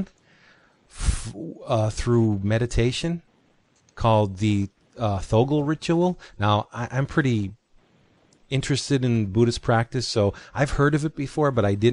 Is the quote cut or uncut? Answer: uncut